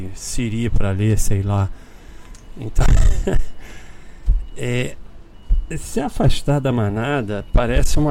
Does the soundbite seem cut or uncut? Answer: uncut